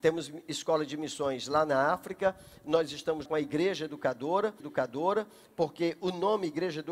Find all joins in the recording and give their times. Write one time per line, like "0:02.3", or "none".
0:03.2
0:04.6